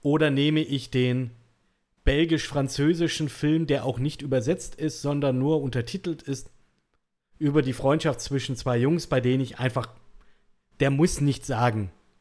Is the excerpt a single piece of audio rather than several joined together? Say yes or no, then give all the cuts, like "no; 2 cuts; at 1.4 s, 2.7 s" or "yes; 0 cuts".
yes; 0 cuts